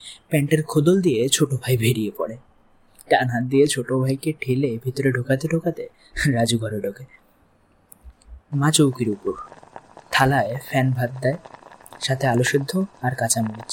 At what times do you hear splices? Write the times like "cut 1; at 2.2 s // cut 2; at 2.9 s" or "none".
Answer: none